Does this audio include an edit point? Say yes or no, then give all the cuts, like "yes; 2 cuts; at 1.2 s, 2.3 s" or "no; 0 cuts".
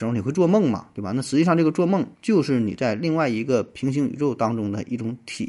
yes; 1 cut; at 2.1 s